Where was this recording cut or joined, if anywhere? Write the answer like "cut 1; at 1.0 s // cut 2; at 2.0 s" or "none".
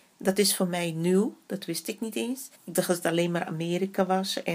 cut 1; at 2.5 s